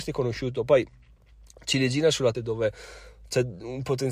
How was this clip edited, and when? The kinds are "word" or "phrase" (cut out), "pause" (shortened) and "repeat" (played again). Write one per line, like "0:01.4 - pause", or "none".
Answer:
0:02.3 - phrase